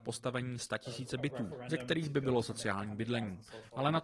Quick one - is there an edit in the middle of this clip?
no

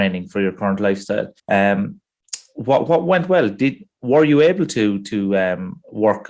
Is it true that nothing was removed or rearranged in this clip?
no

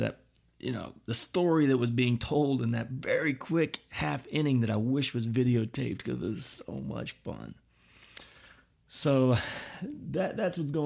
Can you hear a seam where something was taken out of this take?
no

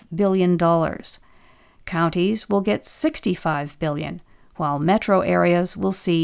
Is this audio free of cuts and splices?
yes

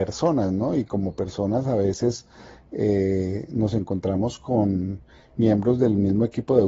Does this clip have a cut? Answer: no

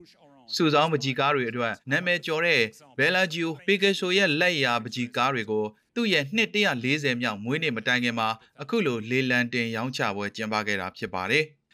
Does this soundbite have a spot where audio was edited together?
yes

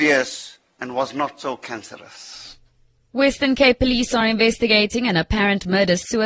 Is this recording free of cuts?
yes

